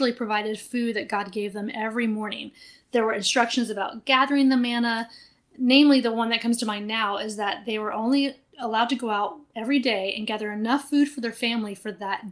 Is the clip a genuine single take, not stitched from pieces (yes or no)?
yes